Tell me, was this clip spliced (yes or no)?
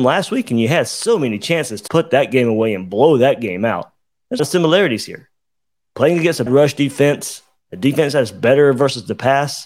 yes